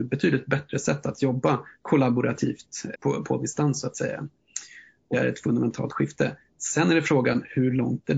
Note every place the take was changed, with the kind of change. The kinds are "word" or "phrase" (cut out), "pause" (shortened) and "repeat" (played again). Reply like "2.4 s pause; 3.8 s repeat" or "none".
2.9 s word; 5.1 s word